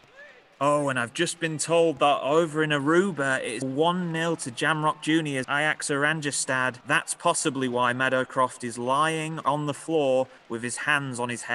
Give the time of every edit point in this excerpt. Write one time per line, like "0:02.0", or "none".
0:03.6
0:05.4
0:06.8